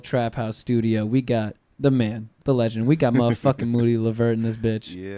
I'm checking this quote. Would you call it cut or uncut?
cut